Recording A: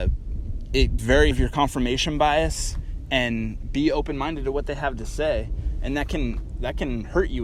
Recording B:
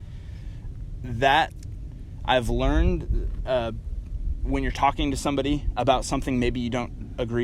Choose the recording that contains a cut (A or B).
A